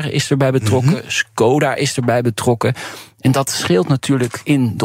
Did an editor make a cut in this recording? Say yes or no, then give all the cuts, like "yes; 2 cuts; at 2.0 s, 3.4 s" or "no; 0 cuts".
no; 0 cuts